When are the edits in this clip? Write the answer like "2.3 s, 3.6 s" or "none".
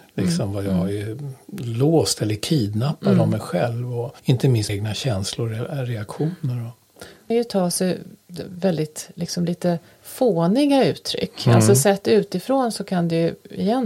4.2 s, 4.7 s, 7.3 s